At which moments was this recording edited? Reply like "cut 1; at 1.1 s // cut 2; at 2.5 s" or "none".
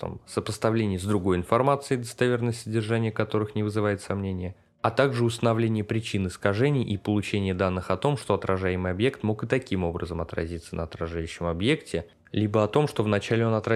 none